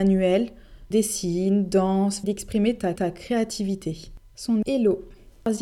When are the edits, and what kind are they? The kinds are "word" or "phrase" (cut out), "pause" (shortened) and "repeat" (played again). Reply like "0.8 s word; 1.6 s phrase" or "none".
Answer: 0.9 s word; 2.2 s phrase; 3.0 s repeat; 4.6 s word